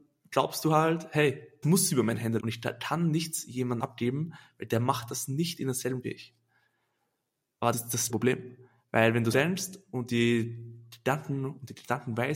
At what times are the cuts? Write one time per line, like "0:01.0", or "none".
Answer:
0:01.6
0:02.4
0:03.8
0:06.0
0:07.7
0:08.1
0:09.3